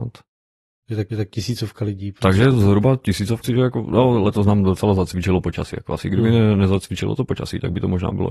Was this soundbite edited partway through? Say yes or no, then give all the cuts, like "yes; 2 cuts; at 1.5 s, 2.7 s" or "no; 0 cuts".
yes; 2 cuts; at 1.1 s, 3.4 s